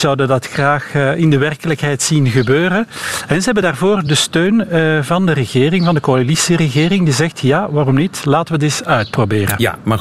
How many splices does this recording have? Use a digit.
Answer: 0